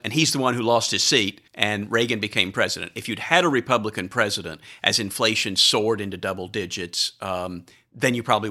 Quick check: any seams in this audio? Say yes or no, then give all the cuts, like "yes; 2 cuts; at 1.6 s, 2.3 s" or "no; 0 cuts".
yes; 1 cut; at 1.5 s